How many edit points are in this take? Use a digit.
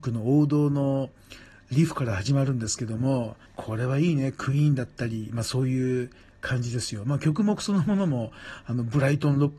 1